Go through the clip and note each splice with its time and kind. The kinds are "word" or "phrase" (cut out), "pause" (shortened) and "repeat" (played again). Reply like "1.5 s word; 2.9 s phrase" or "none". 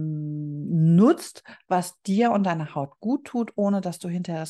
none